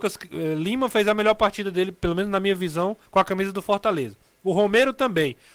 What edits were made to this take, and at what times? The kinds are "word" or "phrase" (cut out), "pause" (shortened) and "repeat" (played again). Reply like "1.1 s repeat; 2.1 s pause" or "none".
3.0 s pause